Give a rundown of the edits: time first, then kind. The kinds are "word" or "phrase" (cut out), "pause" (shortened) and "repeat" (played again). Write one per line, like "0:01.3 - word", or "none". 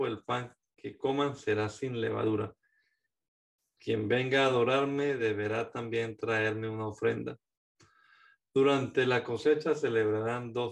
none